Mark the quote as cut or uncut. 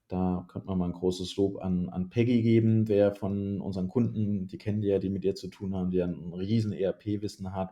uncut